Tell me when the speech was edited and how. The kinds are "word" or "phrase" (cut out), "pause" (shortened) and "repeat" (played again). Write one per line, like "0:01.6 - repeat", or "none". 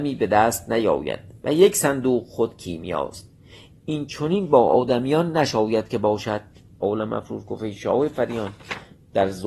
none